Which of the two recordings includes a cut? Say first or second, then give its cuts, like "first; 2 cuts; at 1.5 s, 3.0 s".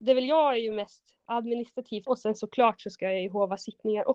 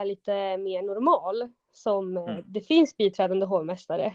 first; 1 cut; at 2.1 s